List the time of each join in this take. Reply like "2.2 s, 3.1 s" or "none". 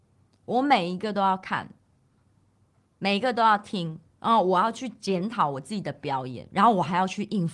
4.1 s